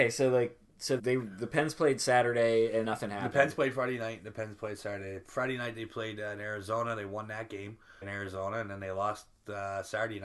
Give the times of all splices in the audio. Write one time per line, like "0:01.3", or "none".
0:01.0
0:02.8
0:08.0